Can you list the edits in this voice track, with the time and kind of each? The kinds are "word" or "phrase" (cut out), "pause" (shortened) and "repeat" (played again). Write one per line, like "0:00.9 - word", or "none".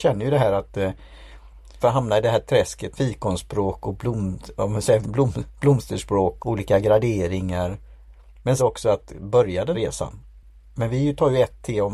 0:01.8 - word
0:03.0 - word
0:05.0 - word
0:06.4 - word
0:08.6 - word
0:09.7 - word